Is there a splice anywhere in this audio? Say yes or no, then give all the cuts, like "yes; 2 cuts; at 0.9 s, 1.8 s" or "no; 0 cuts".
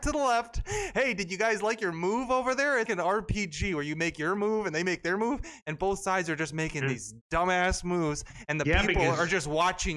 yes; 1 cut; at 2.9 s